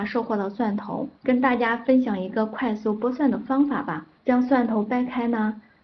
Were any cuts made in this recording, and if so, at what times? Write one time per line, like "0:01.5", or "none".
0:01.2
0:04.2